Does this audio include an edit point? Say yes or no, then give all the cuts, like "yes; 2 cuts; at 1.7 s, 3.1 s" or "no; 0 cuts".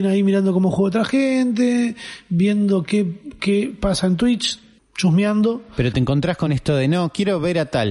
no; 0 cuts